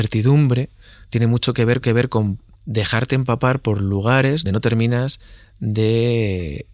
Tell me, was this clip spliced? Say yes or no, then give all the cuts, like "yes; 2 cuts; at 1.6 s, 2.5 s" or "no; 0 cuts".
yes; 2 cuts; at 1.8 s, 4.5 s